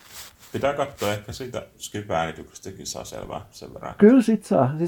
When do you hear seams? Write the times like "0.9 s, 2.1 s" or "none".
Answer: 1.7 s